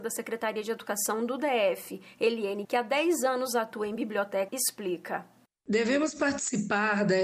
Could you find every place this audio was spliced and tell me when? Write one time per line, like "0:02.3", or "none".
0:02.6
0:04.5